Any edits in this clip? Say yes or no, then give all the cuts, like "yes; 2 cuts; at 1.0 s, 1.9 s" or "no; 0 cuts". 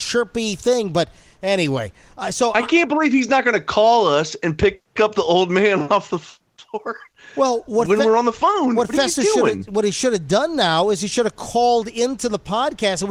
no; 0 cuts